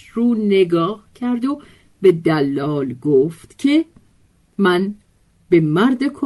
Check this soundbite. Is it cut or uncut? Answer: uncut